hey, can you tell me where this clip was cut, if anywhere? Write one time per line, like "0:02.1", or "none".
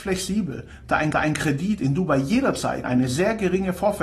0:01.1
0:02.8